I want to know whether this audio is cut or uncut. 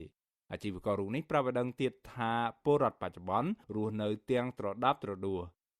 cut